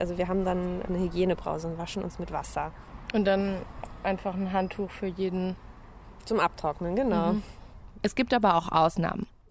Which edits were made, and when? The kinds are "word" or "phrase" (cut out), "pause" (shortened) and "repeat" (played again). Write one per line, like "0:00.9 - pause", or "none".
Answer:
none